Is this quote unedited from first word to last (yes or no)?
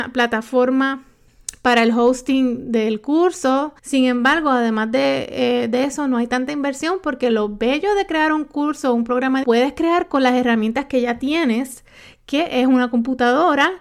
no